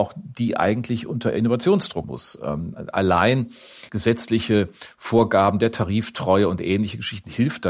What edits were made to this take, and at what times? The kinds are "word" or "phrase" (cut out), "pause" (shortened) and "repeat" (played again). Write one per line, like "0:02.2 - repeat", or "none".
0:02.0 - word
0:03.9 - word